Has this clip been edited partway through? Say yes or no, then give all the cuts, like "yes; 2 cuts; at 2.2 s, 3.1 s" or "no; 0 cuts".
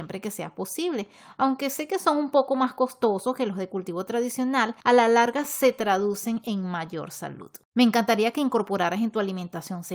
yes; 2 cuts; at 4.8 s, 7.6 s